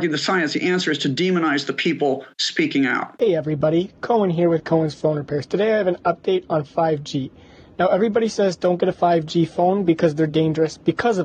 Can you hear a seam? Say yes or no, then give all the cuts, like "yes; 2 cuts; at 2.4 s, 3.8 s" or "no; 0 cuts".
no; 0 cuts